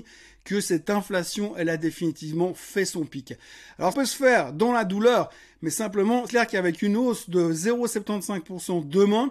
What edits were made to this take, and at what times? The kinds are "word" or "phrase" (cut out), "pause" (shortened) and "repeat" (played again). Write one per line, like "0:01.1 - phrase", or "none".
0:03.9 - word
0:06.3 - word